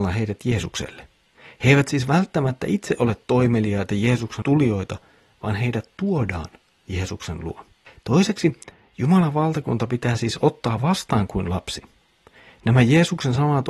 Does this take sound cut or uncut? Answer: cut